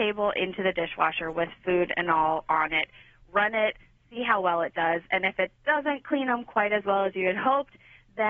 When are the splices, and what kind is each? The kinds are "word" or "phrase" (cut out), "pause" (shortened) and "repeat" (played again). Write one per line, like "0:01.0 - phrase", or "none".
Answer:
none